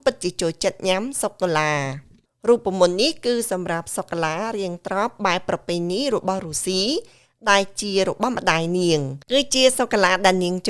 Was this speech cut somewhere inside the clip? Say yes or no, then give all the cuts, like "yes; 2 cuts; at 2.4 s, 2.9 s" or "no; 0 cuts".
yes; 1 cut; at 9.2 s